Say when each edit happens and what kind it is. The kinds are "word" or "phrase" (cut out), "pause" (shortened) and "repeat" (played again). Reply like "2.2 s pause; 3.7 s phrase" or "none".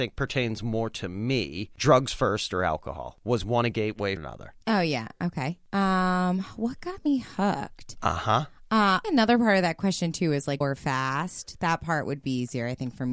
1.8 s word; 4.2 s word; 4.6 s pause; 9.0 s word; 10.6 s phrase